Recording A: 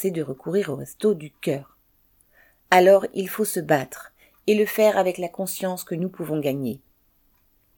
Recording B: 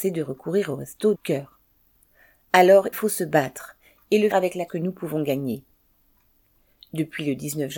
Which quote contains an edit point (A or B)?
B